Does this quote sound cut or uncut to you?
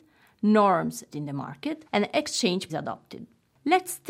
cut